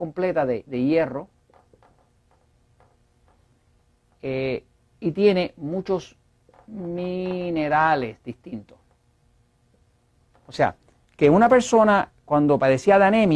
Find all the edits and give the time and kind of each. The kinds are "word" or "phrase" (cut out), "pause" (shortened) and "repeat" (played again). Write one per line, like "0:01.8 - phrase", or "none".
none